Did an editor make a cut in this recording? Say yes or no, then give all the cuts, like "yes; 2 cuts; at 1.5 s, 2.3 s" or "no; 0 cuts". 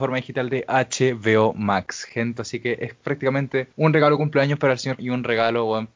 yes; 2 cuts; at 3.7 s, 5.0 s